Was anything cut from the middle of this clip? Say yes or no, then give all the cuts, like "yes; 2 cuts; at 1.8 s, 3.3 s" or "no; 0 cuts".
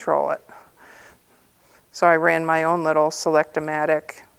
no; 0 cuts